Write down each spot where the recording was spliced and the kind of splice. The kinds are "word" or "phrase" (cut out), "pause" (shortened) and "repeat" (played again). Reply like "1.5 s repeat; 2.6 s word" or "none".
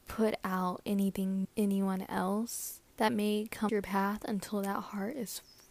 1.4 s phrase; 2.9 s pause; 3.7 s word